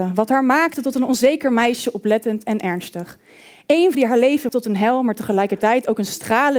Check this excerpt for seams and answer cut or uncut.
cut